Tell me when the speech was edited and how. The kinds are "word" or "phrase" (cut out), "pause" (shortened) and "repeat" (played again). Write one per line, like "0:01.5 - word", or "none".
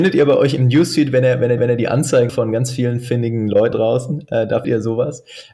0:01.6 - repeat
0:02.3 - word
0:03.7 - word
0:04.6 - word